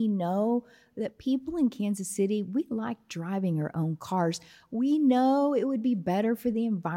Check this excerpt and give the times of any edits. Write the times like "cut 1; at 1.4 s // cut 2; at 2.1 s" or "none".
none